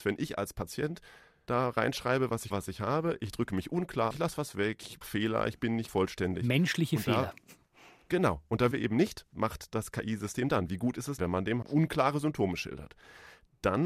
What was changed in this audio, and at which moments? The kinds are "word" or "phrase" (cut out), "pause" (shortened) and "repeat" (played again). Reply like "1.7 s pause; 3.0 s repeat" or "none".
2.5 s word; 4.1 s word; 5.0 s word; 5.9 s word; 8.7 s word; 9.3 s word; 11.2 s word; 11.6 s word